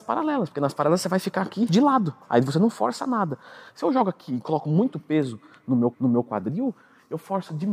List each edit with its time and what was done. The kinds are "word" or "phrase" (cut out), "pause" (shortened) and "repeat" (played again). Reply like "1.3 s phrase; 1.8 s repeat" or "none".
1.7 s word; 5.9 s repeat